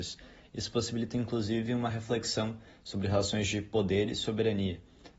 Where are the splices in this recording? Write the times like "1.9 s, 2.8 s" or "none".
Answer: none